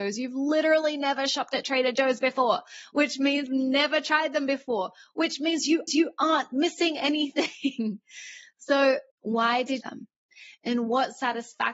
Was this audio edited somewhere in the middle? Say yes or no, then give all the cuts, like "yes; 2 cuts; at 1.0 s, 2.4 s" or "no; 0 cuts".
yes; 4 cuts; at 3.5 s, 5.9 s, 9.1 s, 9.8 s